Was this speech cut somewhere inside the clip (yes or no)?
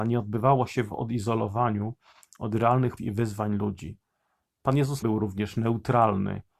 yes